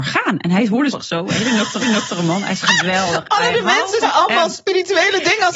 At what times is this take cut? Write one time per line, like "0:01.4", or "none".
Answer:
0:00.9
0:01.8
0:03.5
0:04.0